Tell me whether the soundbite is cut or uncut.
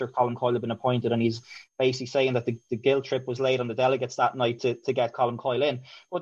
uncut